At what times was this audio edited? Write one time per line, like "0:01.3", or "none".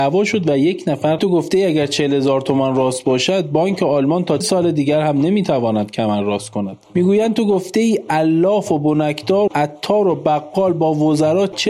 0:01.2
0:04.4
0:09.5